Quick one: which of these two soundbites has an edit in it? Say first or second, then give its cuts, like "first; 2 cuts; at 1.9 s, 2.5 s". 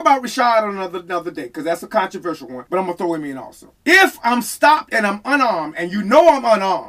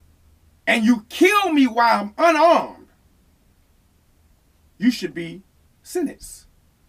first; 2 cuts; at 2.7 s, 3.8 s